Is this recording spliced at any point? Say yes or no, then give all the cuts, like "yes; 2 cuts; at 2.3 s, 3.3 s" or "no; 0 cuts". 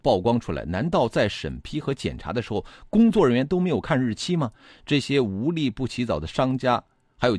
no; 0 cuts